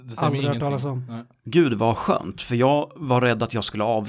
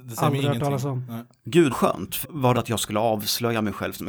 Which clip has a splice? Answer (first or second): second